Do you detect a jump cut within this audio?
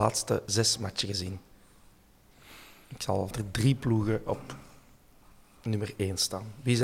yes; 1 cut; at 3.3 s

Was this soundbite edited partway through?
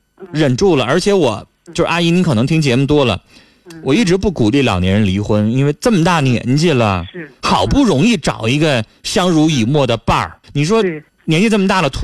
yes; 1 cut; at 10.4 s

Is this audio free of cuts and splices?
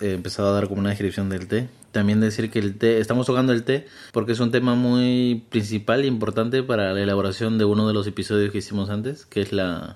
no; 1 cut; at 4.1 s

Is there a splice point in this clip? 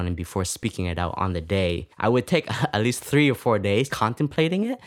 yes; 2 cuts; at 1.9 s, 3.9 s

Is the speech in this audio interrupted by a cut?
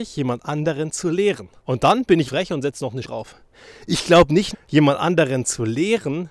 yes; 4 cuts; at 1.6 s, 2.3 s, 3.0 s, 4.5 s

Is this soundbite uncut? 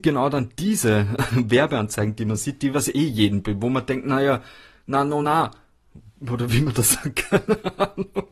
yes; 0 cuts

